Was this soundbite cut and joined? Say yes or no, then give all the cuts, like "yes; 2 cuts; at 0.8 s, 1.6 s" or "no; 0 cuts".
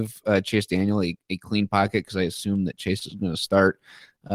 no; 0 cuts